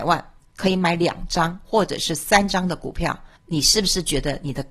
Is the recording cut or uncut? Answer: cut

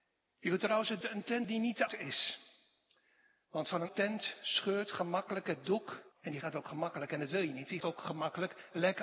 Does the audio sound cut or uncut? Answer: cut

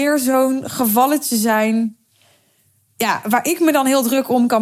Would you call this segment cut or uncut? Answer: uncut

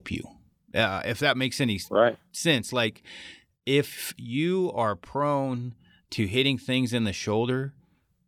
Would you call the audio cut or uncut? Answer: uncut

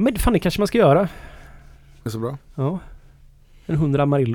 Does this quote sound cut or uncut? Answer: cut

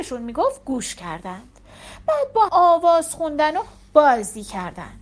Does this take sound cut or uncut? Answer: cut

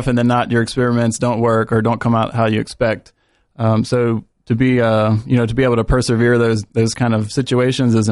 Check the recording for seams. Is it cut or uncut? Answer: uncut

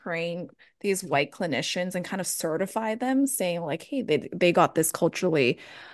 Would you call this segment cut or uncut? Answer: uncut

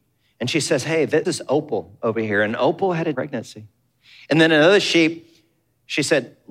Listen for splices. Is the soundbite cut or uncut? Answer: cut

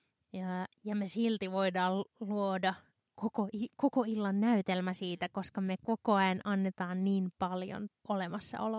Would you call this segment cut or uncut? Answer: uncut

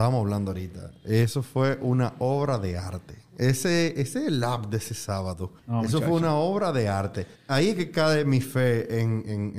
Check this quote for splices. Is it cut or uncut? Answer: cut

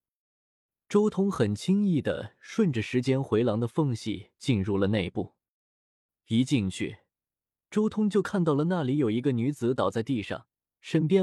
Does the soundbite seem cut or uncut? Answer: uncut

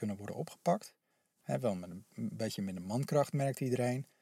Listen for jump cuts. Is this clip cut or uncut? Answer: uncut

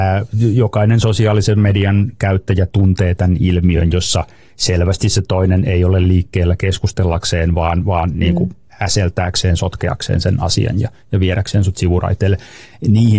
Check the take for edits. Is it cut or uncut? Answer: uncut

